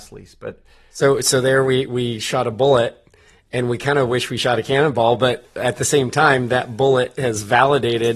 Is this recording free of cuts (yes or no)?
yes